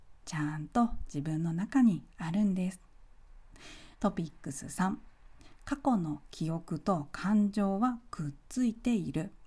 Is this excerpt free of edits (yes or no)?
no